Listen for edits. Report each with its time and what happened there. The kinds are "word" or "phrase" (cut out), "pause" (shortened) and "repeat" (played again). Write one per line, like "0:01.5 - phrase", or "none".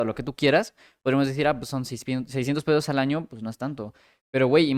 none